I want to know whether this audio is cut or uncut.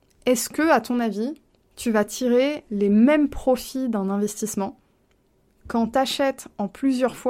uncut